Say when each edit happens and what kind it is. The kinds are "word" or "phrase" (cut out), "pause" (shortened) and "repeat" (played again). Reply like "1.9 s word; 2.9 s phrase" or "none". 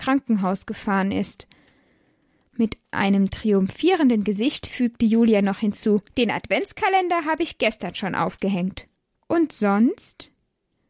6.1 s pause; 9.0 s pause

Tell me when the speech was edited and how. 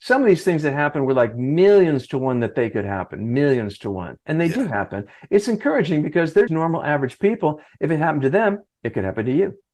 4.2 s pause; 6.5 s word; 8.7 s pause

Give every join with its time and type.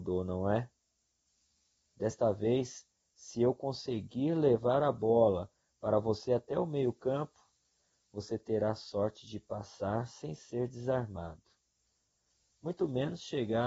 none

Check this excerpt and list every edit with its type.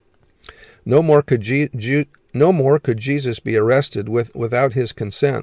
none

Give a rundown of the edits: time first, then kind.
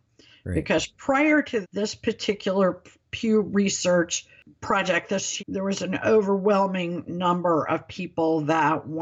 1.6 s word; 5.4 s word

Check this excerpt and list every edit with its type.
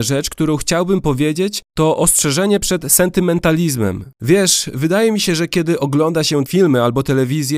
1.7 s pause; 4.1 s pause

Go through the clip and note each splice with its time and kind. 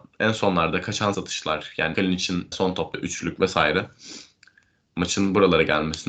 1.1 s word; 1.9 s word; 2.5 s word; 2.9 s word

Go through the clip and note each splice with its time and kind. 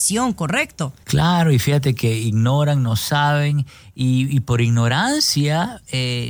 none

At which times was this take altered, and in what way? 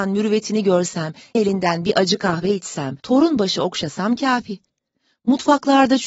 1.3 s word; 3.0 s pause

